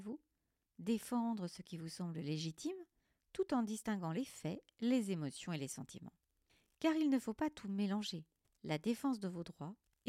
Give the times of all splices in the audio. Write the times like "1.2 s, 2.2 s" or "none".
none